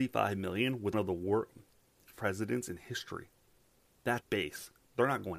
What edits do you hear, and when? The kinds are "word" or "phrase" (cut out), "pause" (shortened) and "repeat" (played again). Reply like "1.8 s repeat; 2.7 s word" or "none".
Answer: 0.9 s word; 4.2 s word